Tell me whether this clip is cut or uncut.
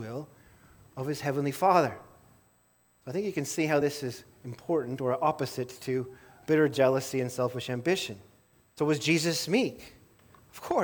uncut